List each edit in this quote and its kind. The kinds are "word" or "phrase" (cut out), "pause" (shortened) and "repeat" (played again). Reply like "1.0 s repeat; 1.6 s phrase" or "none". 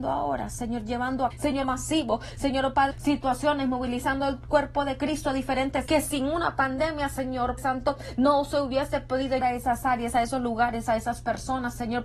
1.3 s word; 1.6 s word; 2.9 s word; 5.9 s word; 7.6 s word; 9.4 s word